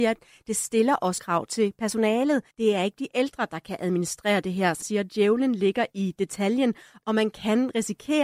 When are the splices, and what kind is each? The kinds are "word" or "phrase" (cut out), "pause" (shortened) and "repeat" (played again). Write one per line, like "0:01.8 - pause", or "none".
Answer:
0:01.2 - word
0:02.5 - pause
0:04.8 - word